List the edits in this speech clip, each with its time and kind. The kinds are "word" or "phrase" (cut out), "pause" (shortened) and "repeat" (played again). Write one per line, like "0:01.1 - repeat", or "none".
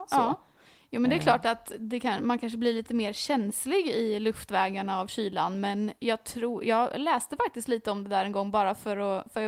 none